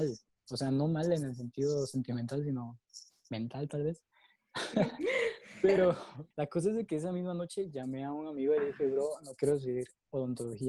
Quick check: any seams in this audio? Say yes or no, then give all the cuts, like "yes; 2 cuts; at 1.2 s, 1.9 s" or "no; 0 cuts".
yes; 1 cut; at 6.3 s